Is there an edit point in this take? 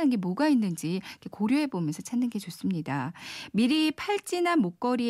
no; 0 cuts

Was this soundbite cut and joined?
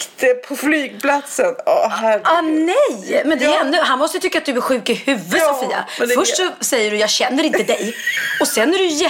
no; 0 cuts

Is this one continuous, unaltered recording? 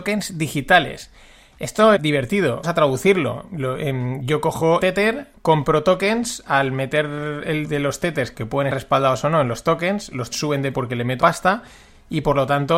no; 9 cuts; at 2.0 s, 2.6 s, 4.8 s, 7.6 s, 8.3 s, 8.7 s, 10.3 s, 10.7 s, 11.2 s

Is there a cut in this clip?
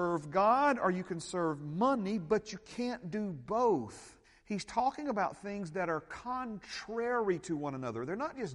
yes; 1 cut; at 4.2 s

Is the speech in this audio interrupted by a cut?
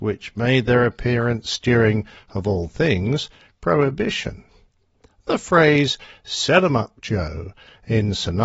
no; 0 cuts

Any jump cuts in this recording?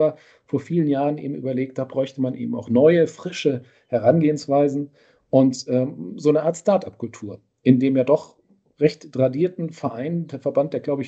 no; 0 cuts

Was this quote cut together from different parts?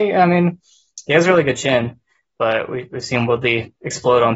no; 0 cuts

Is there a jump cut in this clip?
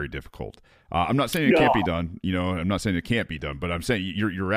no; 0 cuts

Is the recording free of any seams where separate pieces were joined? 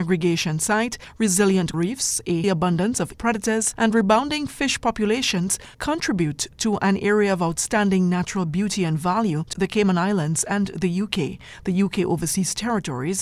no; 4 cuts; at 1.7 s, 2.4 s, 3.1 s, 9.5 s

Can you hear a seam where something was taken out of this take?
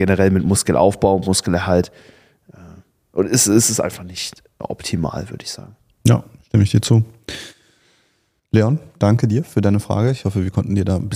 no; 0 cuts

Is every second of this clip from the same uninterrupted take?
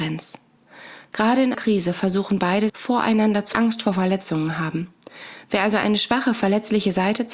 no; 3 cuts; at 1.5 s, 2.7 s, 3.5 s

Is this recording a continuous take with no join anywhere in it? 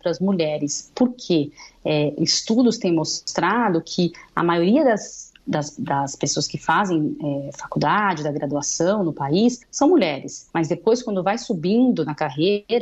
no; 3 cuts; at 5.4 s, 9.6 s, 10.5 s

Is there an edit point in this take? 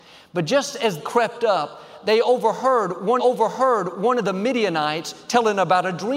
yes; 2 cuts; at 1.0 s, 3.2 s

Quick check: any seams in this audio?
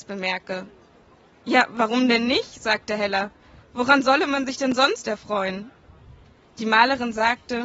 no; 0 cuts

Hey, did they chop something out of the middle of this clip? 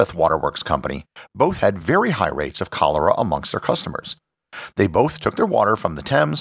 no; 0 cuts

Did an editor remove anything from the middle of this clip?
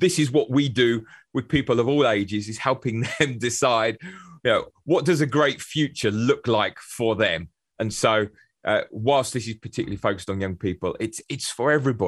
no; 0 cuts

